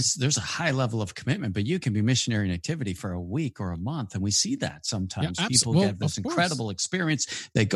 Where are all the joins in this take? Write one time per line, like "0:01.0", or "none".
none